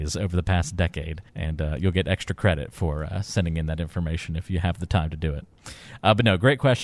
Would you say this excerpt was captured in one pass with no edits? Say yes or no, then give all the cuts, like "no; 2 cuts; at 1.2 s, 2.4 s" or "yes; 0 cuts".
no; 1 cut; at 1.3 s